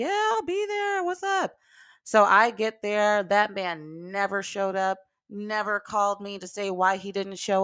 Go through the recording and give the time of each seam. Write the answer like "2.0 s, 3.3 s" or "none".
none